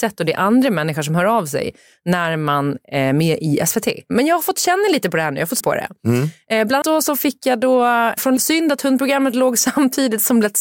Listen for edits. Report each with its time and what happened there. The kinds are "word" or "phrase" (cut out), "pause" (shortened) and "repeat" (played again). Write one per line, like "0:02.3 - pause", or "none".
0:05.6 - word
0:06.8 - word
0:08.4 - phrase